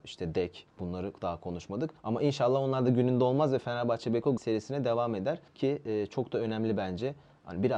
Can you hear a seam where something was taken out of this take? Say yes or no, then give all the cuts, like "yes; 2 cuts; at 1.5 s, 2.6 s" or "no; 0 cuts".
yes; 3 cuts; at 2.0 s, 4.4 s, 5.5 s